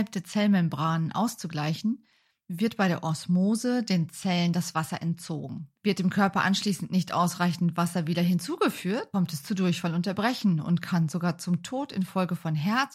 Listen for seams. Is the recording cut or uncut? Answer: uncut